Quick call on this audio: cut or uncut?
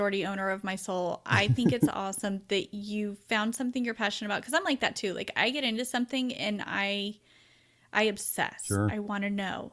uncut